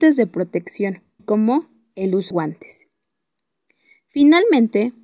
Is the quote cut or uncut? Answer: cut